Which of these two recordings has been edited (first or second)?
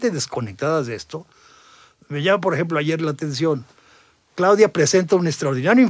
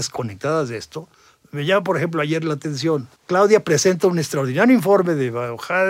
second